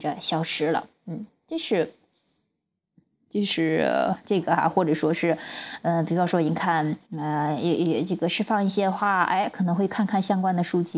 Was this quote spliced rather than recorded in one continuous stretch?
yes; 1 cut; at 7.0 s

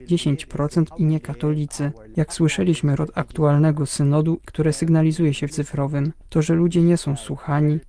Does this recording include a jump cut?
yes; 4 cuts; at 0.9 s, 3.0 s, 4.4 s, 5.5 s

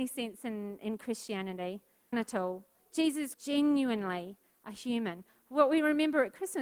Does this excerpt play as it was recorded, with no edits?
no; 2 cuts; at 2.1 s, 3.3 s

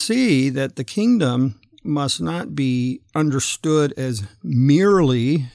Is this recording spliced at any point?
no; 0 cuts

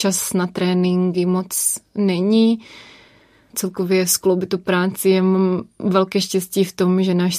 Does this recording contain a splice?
yes; 1 cut; at 3.5 s

